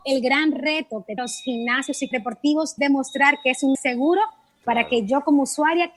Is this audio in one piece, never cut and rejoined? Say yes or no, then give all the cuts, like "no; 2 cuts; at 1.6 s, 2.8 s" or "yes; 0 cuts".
no; 4 cuts; at 1.2 s, 2.1 s, 2.8 s, 3.7 s